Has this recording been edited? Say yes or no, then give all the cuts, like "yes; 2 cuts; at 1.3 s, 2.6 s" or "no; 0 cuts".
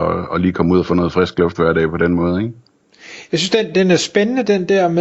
no; 0 cuts